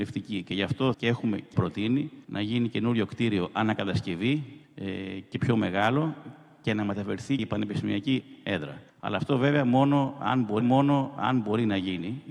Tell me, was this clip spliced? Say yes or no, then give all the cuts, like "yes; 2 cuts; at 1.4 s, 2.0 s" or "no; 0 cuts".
yes; 7 cuts; at 0.9 s, 1.5 s, 2.2 s, 4.6 s, 7.4 s, 8.9 s, 10.6 s